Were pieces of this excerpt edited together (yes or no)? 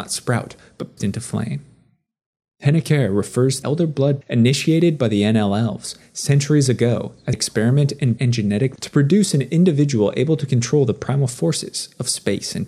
yes